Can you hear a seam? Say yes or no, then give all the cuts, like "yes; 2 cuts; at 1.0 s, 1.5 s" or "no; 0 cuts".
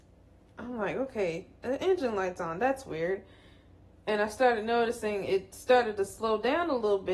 no; 0 cuts